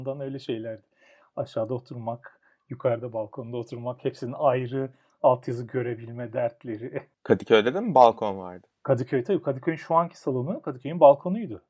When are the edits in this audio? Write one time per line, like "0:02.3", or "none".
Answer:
none